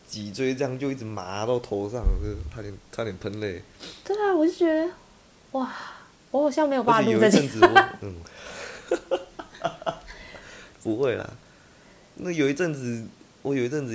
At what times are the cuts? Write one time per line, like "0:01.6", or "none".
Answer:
0:02.5